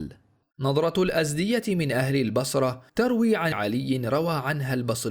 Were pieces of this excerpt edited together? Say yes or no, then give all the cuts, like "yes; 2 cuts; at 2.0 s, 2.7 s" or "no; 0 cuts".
yes; 2 cuts; at 2.9 s, 3.5 s